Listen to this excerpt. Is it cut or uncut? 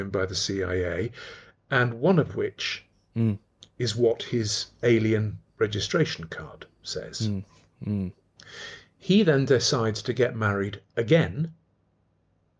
uncut